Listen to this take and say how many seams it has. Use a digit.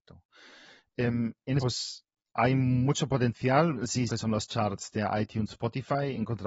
4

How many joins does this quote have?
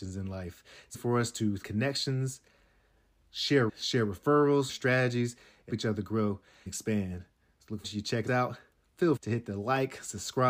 9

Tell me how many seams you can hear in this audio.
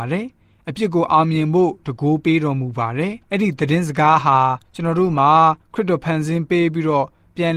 3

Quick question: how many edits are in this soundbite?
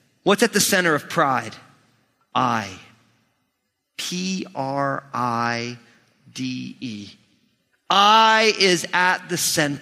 0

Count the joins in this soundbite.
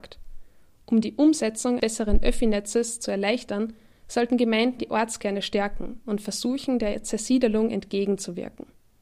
2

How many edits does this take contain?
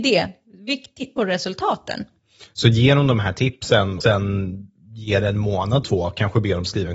3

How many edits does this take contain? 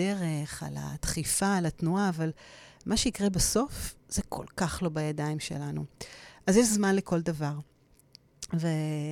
0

